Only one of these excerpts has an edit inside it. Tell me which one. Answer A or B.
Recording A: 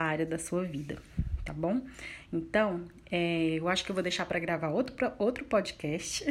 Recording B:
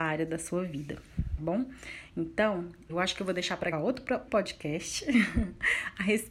B